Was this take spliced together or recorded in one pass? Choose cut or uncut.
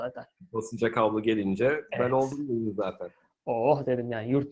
uncut